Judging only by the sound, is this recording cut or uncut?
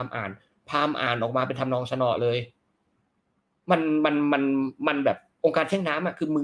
uncut